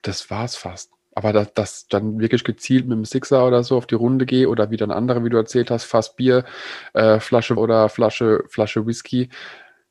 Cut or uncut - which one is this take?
cut